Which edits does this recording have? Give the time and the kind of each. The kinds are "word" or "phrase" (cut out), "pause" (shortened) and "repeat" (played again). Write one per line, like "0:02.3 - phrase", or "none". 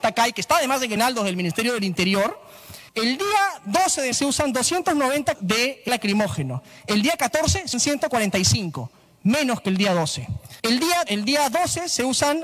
0:01.0 - word
0:02.9 - pause
0:04.1 - word
0:05.3 - word
0:05.9 - word
0:07.7 - word
0:10.6 - pause
0:11.1 - word